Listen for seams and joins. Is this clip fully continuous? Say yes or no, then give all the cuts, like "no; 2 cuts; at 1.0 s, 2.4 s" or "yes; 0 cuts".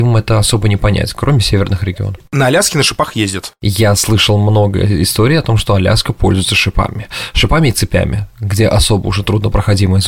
yes; 0 cuts